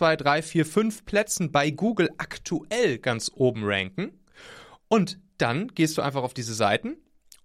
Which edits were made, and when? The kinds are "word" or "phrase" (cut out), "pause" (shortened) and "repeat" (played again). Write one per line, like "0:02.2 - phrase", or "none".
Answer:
0:05.3 - pause